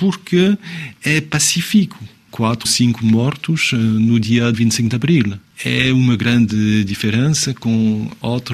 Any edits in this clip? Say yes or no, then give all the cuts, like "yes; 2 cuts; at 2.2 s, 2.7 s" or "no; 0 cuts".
yes; 2 cuts; at 2.6 s, 4.5 s